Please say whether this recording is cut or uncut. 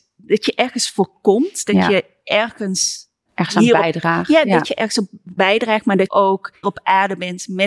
cut